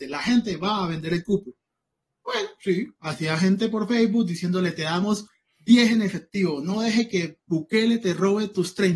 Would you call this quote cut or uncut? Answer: uncut